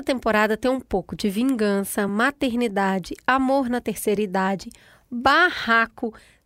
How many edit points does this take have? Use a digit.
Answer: 0